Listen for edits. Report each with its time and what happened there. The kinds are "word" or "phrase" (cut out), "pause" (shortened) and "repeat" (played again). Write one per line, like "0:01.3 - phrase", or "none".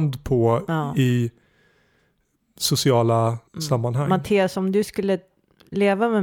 0:03.5 - pause